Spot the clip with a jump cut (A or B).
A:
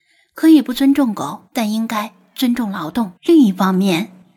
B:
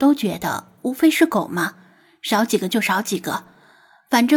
A